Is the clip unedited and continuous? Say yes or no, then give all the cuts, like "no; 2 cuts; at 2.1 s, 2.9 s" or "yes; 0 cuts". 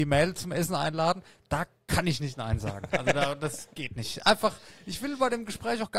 yes; 0 cuts